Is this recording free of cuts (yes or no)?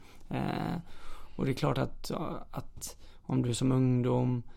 yes